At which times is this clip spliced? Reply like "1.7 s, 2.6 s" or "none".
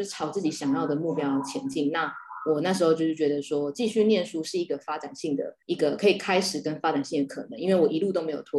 5.6 s